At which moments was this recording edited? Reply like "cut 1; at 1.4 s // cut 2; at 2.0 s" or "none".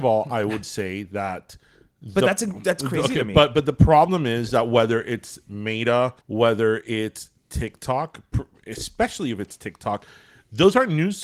cut 1; at 6.2 s